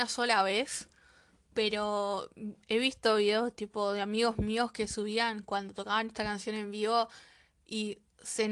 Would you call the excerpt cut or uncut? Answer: uncut